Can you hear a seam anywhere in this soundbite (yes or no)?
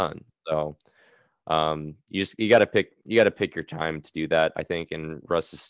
no